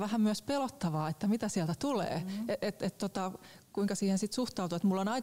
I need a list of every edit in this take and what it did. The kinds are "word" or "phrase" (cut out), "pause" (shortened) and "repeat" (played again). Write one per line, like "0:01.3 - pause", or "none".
0:03.6 - pause